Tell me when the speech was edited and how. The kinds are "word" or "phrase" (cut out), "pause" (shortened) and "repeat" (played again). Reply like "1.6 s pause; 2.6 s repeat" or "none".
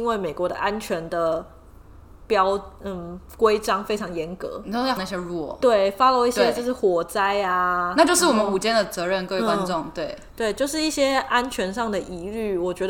5.0 s word

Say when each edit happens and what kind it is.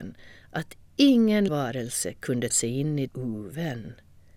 1.5 s word; 2.5 s word; 3.1 s phrase

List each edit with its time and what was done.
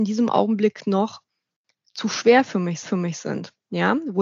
2.8 s repeat

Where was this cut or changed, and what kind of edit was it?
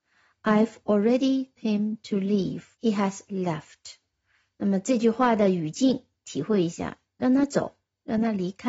1.6 s word; 2.7 s pause; 3.3 s word

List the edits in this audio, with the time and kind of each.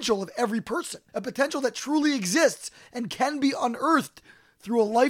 1.1 s pause

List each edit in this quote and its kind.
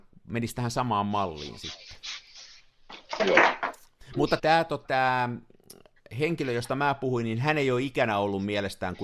4.4 s word; 4.8 s word

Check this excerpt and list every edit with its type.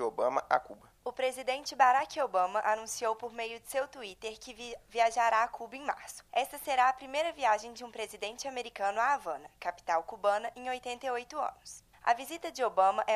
1.0 s pause; 6.3 s pause; 11.9 s pause

